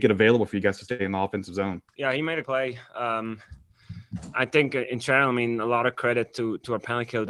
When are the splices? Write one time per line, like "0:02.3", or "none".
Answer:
0:01.9
0:02.4